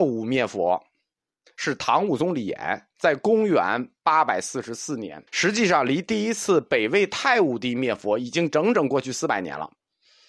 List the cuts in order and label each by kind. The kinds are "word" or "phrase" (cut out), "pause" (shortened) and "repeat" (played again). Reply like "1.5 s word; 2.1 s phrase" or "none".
5.3 s pause